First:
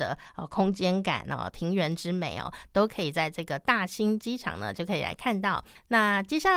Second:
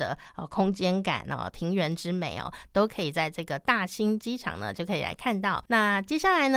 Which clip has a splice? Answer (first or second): second